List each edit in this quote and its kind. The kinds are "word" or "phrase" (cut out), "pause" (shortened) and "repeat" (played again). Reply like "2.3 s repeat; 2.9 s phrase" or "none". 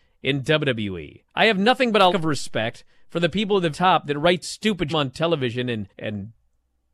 1.3 s pause; 2.1 s word; 3.7 s word; 4.4 s word; 4.9 s phrase; 5.9 s pause

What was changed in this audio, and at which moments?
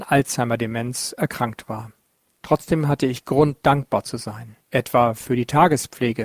2.2 s pause; 4.6 s pause

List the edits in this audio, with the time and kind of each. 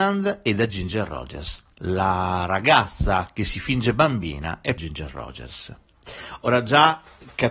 4.8 s word

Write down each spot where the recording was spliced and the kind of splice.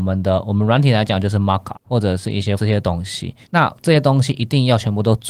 1.7 s word; 2.6 s word; 3.4 s pause

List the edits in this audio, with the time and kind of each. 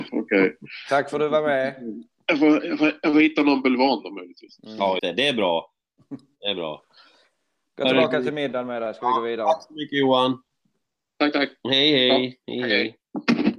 5.0 s word

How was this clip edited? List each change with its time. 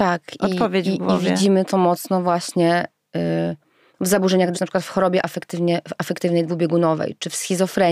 1.7 s word; 4.5 s word

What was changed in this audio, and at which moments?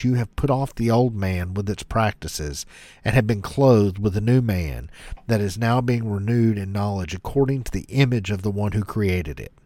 none

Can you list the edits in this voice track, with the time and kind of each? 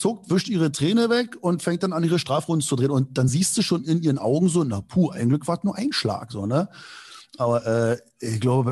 none

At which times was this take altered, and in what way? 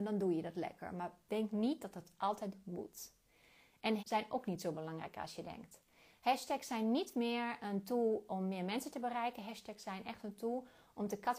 4.0 s word

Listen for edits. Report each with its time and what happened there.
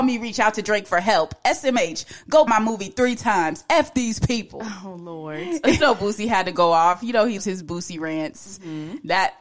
2.5 s word; 5.8 s word; 7.4 s word

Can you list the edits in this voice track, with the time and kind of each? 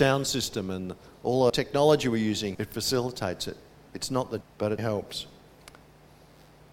1.5 s word; 2.5 s word; 4.4 s word; 4.8 s word

